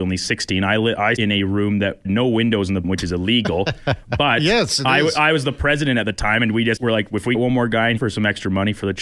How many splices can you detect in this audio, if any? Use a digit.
6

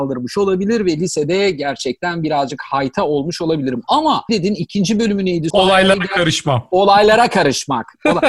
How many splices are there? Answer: 2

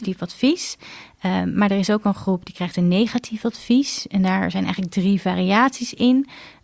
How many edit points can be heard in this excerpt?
0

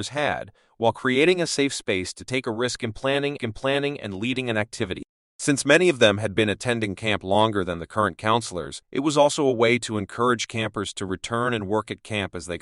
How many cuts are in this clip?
2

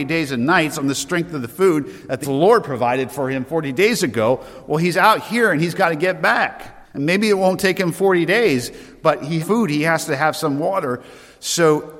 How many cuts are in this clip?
3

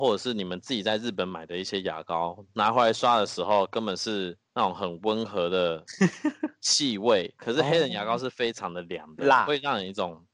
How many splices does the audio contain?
1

